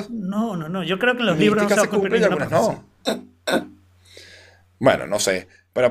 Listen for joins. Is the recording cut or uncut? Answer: uncut